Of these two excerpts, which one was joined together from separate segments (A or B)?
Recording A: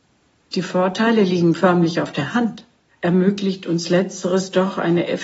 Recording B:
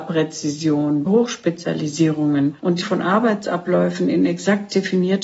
B